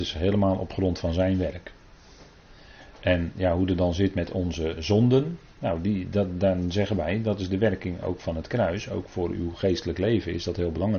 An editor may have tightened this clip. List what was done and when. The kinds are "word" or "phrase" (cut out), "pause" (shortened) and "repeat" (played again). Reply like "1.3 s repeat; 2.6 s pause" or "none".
5.5 s pause